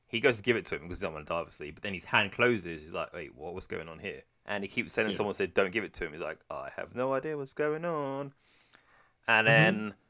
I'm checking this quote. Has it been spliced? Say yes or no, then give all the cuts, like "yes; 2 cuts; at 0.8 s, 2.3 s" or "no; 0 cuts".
yes; 1 cut; at 4.3 s